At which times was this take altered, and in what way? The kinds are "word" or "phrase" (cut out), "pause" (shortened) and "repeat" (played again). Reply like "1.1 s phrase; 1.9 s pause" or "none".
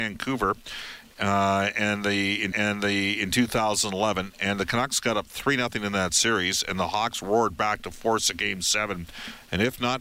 2.5 s repeat